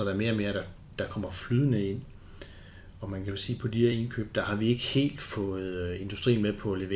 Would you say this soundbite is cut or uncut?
uncut